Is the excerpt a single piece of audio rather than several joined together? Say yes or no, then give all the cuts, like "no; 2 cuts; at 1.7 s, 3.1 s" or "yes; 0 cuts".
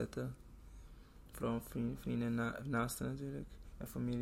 yes; 0 cuts